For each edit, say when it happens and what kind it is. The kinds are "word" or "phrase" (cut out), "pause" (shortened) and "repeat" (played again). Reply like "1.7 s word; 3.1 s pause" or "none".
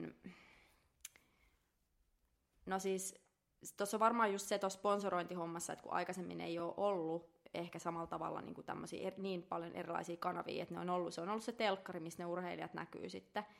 none